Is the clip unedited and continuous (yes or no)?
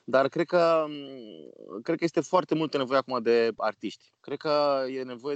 no